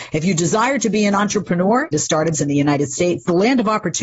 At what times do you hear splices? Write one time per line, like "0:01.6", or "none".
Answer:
0:01.9
0:02.3